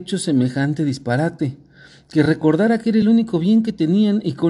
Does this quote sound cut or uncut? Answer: uncut